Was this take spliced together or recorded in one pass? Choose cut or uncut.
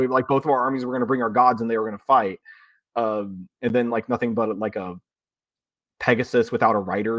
uncut